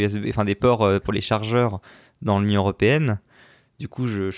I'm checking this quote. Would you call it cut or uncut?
cut